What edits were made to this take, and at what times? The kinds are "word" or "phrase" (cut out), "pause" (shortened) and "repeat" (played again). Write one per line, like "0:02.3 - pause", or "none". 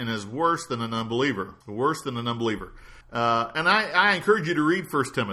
0:01.6 - pause
0:03.0 - pause